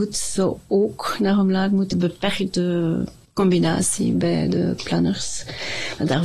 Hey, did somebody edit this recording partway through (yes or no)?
yes